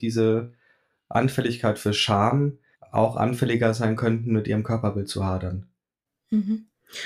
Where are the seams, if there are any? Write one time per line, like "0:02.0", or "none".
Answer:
0:02.7